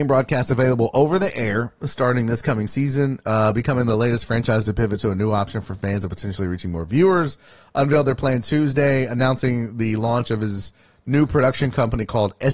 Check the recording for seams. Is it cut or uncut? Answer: uncut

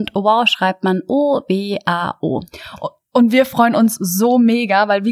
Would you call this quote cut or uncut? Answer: uncut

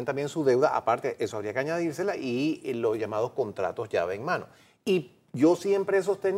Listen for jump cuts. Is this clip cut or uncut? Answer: uncut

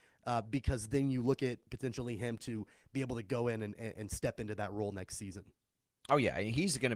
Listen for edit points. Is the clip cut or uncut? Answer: uncut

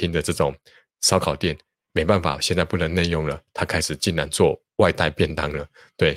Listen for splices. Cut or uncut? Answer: uncut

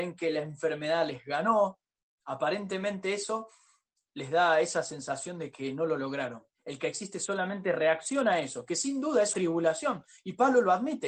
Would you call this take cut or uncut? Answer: cut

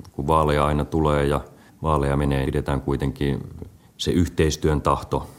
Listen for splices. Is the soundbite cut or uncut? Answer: cut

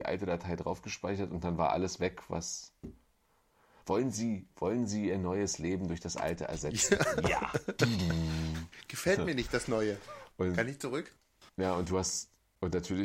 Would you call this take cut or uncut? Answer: uncut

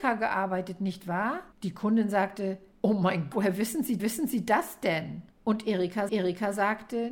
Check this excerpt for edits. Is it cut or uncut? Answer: cut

